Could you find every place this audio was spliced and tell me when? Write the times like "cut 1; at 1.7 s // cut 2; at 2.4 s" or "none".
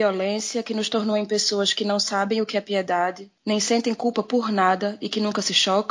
cut 1; at 3.4 s

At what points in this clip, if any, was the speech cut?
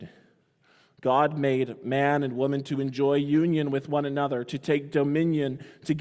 none

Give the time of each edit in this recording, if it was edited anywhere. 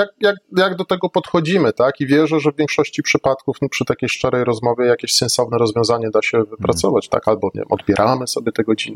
none

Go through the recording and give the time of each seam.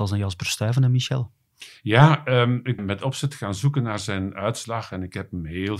cut 1; at 2.8 s

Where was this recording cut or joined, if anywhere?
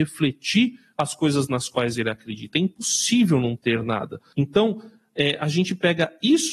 none

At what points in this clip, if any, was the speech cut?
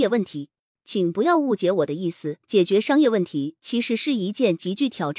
cut 1; at 2.4 s

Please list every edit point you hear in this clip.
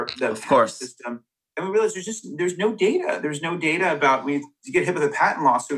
none

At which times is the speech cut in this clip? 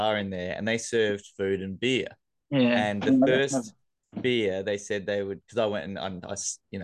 none

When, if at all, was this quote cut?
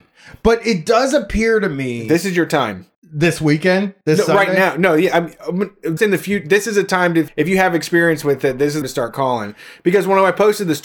cut 1; at 2.9 s // cut 2; at 4.0 s // cut 3; at 6.0 s // cut 4; at 7.3 s // cut 5; at 8.8 s

